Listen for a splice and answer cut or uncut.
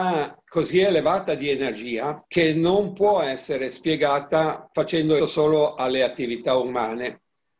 cut